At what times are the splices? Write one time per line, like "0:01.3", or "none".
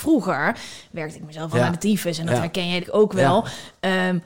0:01.5
0:02.8